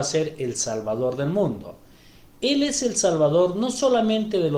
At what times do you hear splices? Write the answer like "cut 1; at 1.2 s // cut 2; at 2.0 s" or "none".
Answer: none

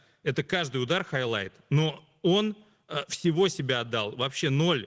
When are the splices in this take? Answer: none

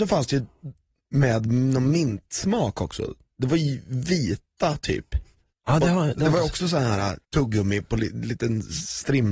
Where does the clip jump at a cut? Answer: none

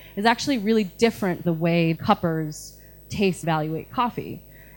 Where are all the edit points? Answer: cut 1; at 1.4 s // cut 2; at 1.9 s // cut 3; at 3.4 s

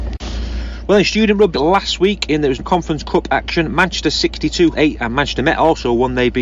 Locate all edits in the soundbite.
cut 1; at 1.5 s // cut 2; at 2.6 s // cut 3; at 4.7 s

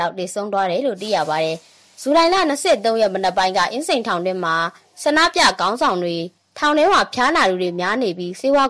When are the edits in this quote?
cut 1; at 6.4 s

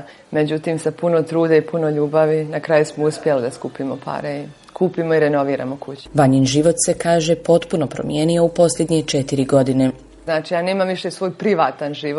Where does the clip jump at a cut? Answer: none

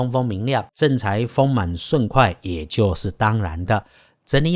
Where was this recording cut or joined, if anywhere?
none

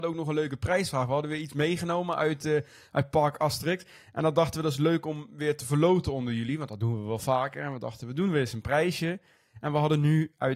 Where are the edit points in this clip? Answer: none

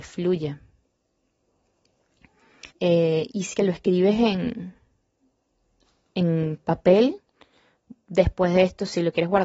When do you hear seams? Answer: cut 1; at 2.7 s // cut 2; at 3.5 s

